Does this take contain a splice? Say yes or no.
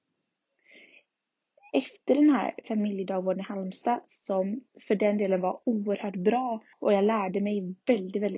yes